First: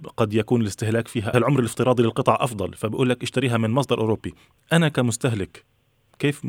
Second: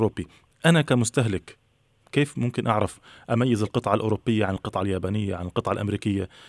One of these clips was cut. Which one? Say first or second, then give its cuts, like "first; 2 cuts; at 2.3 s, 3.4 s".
first; 1 cut; at 1.3 s